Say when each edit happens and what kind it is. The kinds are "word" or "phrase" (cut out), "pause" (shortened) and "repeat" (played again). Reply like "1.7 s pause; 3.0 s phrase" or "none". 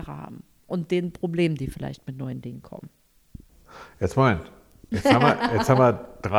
none